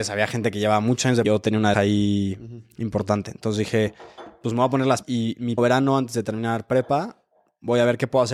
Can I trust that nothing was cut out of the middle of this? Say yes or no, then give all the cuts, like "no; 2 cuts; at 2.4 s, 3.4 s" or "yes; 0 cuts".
no; 4 cuts; at 1.2 s, 1.7 s, 5.0 s, 5.6 s